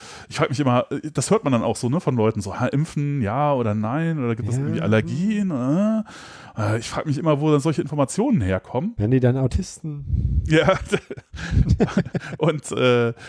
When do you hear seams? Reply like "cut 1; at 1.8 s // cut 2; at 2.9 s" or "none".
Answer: none